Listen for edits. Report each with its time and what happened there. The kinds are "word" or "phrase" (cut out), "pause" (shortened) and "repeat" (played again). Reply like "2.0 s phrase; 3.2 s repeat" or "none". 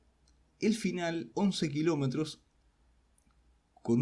1.3 s word